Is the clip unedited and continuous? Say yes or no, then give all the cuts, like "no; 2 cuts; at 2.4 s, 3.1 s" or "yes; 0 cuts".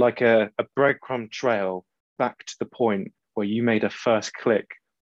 yes; 0 cuts